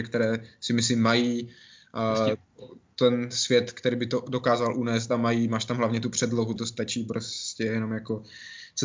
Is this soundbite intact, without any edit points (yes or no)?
no